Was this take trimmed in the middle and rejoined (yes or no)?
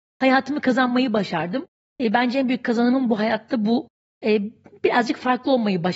no